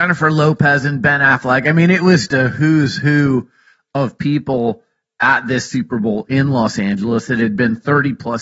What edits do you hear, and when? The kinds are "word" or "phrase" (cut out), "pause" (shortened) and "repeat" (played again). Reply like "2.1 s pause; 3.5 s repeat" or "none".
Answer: 2.3 s word